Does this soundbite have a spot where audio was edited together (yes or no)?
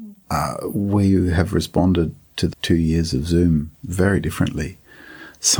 yes